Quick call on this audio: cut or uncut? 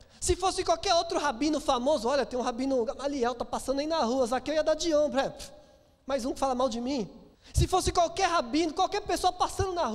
cut